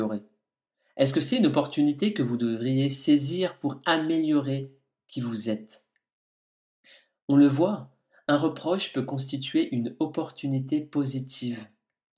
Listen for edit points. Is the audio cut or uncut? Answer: uncut